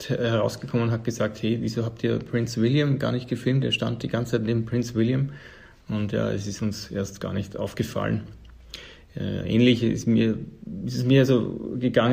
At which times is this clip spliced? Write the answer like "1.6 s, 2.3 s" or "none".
none